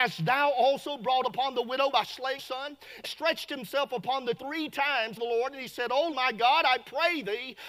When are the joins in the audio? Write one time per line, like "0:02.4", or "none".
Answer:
0:01.2
0:01.9
0:02.4
0:03.0
0:04.4
0:05.2
0:06.1